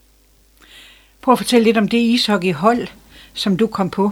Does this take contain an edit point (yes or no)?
no